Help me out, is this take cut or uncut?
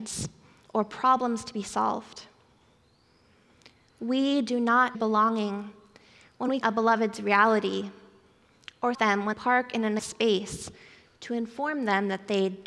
cut